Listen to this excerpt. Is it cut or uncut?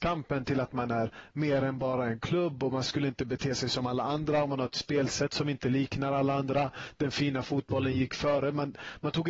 uncut